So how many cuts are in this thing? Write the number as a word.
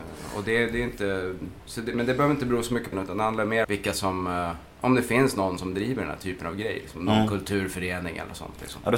two